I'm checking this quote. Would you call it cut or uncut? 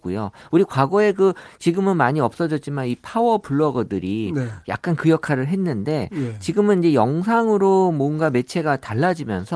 uncut